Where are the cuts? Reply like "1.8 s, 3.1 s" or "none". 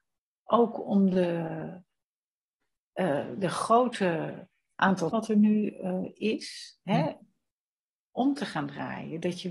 5.1 s